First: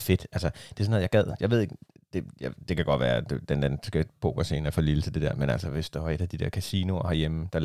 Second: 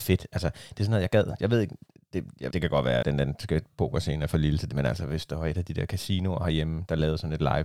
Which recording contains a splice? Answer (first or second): second